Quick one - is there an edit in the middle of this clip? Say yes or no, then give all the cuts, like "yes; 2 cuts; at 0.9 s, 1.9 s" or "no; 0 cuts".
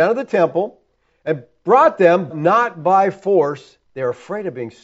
yes; 2 cuts; at 2.3 s, 3.8 s